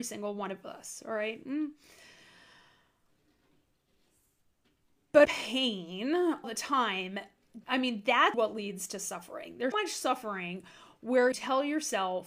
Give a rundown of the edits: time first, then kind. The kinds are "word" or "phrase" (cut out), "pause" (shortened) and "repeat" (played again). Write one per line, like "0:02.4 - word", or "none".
0:05.2 - word
0:06.4 - word
0:07.6 - word
0:08.3 - word
0:09.7 - word
0:11.3 - word